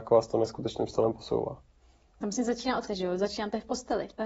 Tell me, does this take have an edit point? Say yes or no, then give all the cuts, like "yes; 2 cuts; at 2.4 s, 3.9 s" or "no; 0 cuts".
yes; 2 cuts; at 2.4 s, 2.9 s